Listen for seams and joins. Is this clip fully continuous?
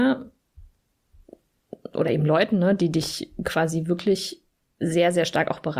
yes; 0 cuts

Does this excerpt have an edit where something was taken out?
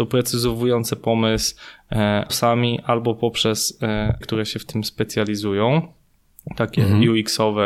yes; 2 cuts; at 2.3 s, 4.2 s

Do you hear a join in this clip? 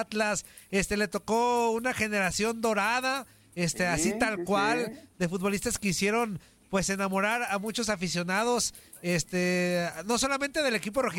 no; 0 cuts

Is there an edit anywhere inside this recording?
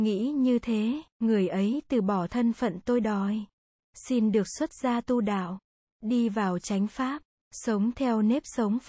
yes; 1 cut; at 1.1 s

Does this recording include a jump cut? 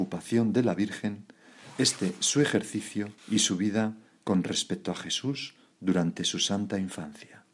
yes; 1 cut; at 3.2 s

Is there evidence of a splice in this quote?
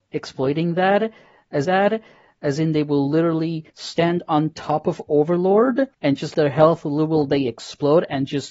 yes; 5 cuts; at 1.6 s, 3.7 s, 5.9 s, 6.3 s, 7.3 s

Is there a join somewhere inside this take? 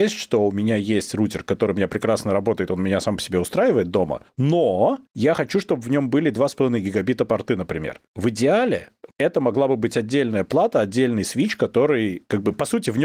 yes; 1 cut; at 9.1 s

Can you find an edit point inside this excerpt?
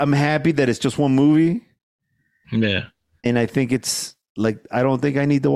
no; 0 cuts

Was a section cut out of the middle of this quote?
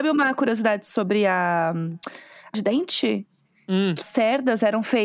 yes; 2 cuts; at 2.5 s, 4.0 s

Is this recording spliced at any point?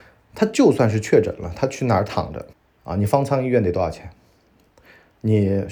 yes; 1 cut; at 2.5 s

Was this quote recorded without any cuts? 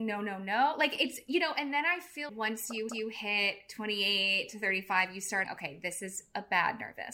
no; 3 cuts; at 2.3 s, 2.9 s, 5.4 s

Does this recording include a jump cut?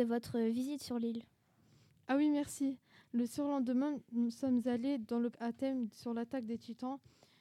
yes; 1 cut; at 5.3 s

